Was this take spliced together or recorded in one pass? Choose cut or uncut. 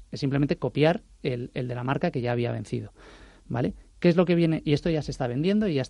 uncut